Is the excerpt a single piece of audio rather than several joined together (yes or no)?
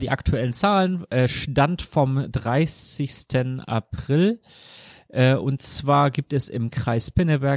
yes